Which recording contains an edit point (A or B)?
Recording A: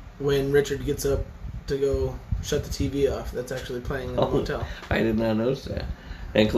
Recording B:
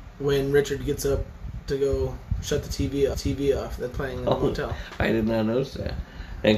B